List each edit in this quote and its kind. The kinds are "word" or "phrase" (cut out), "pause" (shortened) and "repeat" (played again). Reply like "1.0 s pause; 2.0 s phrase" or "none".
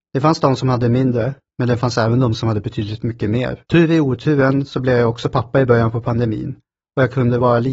3.7 s pause